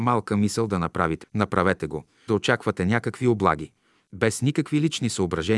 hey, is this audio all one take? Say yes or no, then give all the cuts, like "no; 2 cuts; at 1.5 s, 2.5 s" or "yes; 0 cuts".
no; 2 cuts; at 1.2 s, 2.3 s